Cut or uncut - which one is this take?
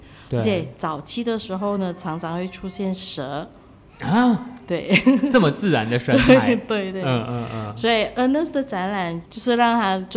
uncut